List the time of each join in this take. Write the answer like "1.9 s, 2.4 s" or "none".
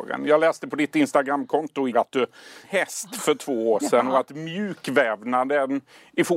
1.9 s, 2.6 s